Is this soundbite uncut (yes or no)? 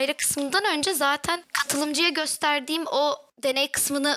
yes